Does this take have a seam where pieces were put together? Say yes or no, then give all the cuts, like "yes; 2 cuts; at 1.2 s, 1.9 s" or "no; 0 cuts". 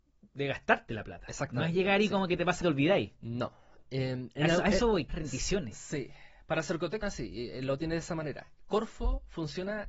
yes; 3 cuts; at 2.6 s, 5.1 s, 7.0 s